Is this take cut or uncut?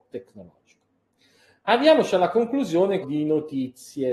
cut